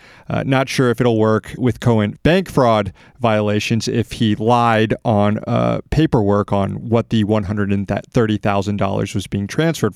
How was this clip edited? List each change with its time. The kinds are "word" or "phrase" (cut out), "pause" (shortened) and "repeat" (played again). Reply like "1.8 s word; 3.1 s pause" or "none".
1.6 s word; 2.2 s word